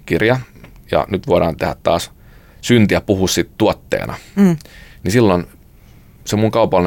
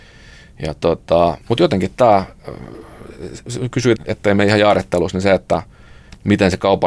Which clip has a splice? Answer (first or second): second